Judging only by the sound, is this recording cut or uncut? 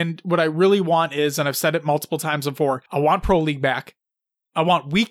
cut